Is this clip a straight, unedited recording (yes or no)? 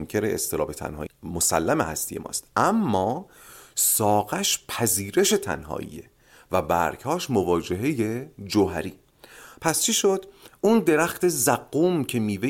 no